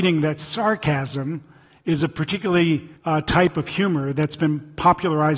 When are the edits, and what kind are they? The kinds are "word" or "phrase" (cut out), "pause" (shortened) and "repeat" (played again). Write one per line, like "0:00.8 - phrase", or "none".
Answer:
0:03.0 - pause